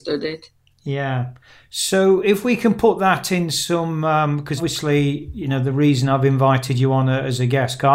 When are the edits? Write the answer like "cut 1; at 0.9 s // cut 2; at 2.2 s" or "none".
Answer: cut 1; at 4.6 s